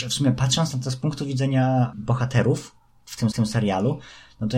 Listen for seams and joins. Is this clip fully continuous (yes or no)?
no